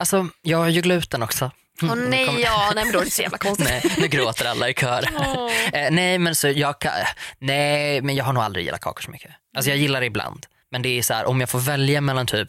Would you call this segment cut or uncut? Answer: uncut